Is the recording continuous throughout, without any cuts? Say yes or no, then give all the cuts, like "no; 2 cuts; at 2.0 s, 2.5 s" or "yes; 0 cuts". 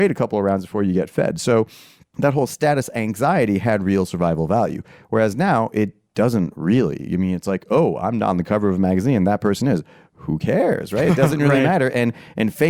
yes; 0 cuts